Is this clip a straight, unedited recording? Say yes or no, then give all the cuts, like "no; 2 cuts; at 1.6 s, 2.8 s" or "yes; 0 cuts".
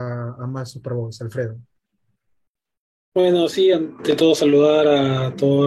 yes; 0 cuts